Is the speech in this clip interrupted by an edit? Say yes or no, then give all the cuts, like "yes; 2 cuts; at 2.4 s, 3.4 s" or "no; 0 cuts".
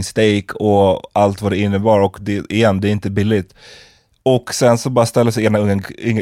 no; 0 cuts